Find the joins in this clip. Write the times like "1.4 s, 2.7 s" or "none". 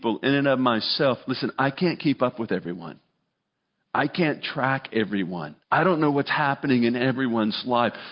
5.6 s